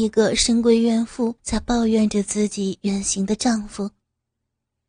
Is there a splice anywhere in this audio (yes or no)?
yes